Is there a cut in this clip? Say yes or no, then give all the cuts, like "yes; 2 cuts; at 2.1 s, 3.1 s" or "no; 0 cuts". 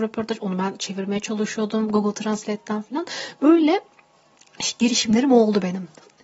no; 0 cuts